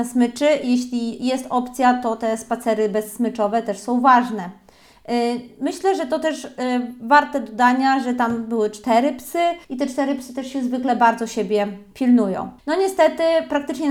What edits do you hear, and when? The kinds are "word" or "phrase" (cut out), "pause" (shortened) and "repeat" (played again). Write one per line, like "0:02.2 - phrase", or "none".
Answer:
0:09.6 - pause
0:12.6 - pause